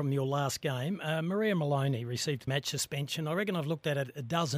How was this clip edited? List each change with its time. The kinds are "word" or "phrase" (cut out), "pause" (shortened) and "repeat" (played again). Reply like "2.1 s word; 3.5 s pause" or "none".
2.5 s word